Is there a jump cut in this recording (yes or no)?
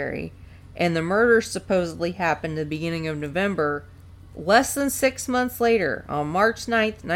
no